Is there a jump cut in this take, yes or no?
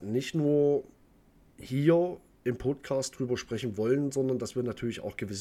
no